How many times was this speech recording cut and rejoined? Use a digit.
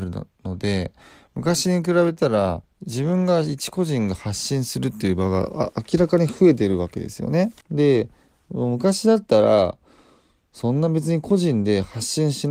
2